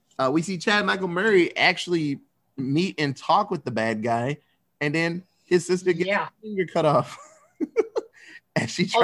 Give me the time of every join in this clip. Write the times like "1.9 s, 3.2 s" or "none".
none